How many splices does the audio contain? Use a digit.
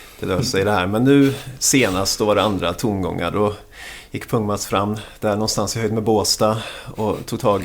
0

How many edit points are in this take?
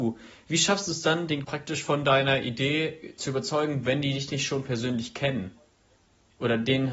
1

